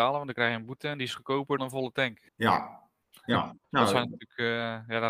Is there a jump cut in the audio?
yes; 3 cuts; at 1.6 s, 2.3 s, 3.6 s

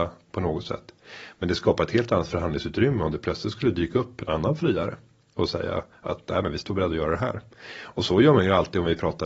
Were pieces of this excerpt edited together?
no; 0 cuts

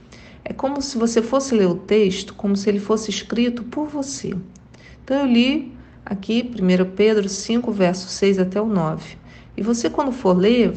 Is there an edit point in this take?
no; 0 cuts

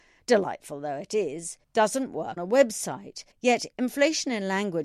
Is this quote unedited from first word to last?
no; 3 cuts; at 1.6 s, 2.4 s, 3.3 s

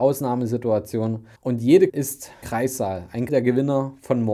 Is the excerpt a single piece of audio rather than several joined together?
no; 4 cuts; at 1.4 s, 1.9 s, 2.4 s, 3.3 s

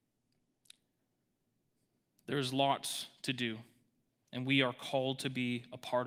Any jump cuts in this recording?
no; 0 cuts

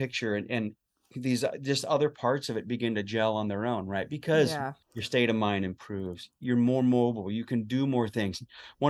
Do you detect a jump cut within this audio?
yes; 1 cut; at 4.8 s

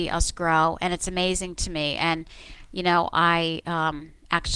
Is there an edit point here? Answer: no; 0 cuts

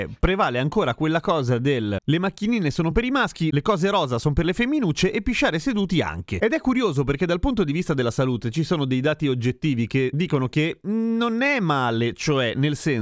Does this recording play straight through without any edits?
yes; 0 cuts

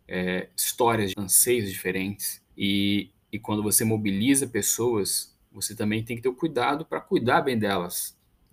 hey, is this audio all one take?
no; 2 cuts; at 1.1 s, 2.5 s

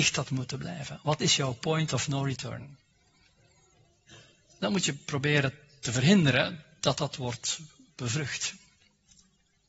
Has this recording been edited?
no; 0 cuts

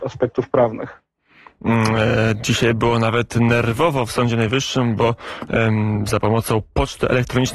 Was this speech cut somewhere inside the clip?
no; 0 cuts

